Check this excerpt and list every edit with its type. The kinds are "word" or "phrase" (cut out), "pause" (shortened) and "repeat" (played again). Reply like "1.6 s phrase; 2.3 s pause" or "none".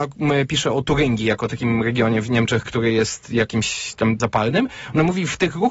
2.7 s word; 4.2 s word

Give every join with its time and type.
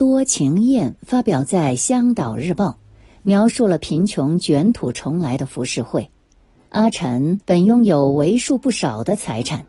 6.4 s pause; 7.4 s pause

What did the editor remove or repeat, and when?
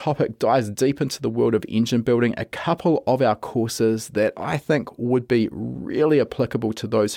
none

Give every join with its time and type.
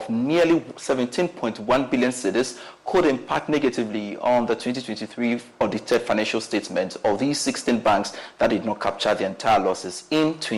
none

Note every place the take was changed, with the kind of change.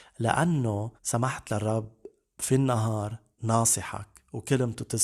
1.0 s pause; 3.4 s word

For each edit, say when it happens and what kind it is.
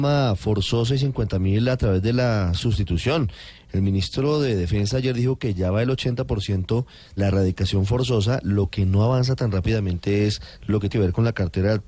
7.2 s word; 10.9 s word

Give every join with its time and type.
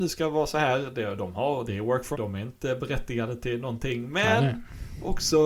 2.1 s word

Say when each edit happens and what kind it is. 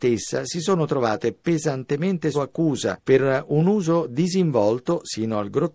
2.3 s word

